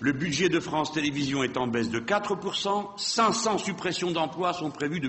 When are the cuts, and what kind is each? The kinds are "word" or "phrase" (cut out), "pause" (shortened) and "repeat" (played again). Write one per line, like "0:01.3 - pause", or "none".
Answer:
none

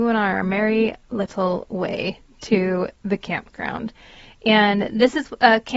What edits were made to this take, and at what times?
none

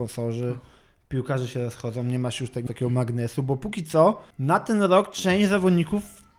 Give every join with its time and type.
0:02.7 - phrase
0:04.3 - pause

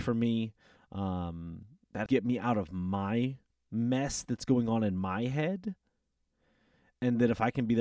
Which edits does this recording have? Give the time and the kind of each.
0:02.1 - word

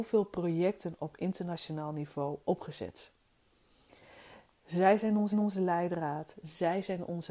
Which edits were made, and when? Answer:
0:05.3 - repeat

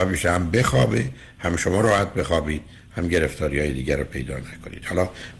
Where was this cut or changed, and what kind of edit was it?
none

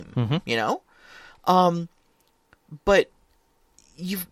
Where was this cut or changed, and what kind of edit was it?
none

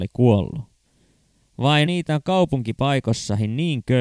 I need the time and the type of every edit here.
0:01.9 - word

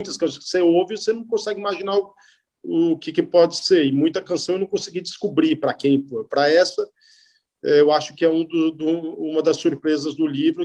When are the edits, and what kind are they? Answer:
none

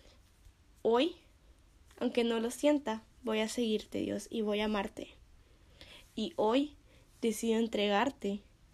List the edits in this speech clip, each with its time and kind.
none

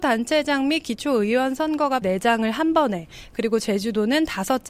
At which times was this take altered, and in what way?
0:02.0 - phrase

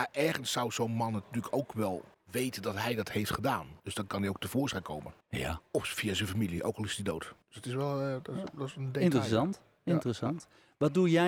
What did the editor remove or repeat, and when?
0:02.1 - pause
0:03.8 - pause
0:05.2 - pause
0:07.4 - pause

